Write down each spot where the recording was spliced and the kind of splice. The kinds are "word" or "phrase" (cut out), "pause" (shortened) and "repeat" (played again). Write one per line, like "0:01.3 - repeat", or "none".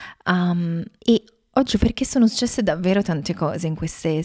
0:01.0 - pause
0:01.8 - phrase